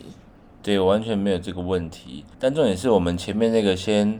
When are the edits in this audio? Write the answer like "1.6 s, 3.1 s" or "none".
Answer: 2.3 s